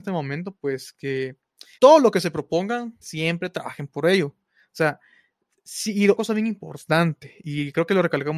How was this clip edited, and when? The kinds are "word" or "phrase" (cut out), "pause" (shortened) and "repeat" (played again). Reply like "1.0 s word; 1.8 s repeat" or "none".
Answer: 1.7 s phrase; 3.0 s word; 6.2 s word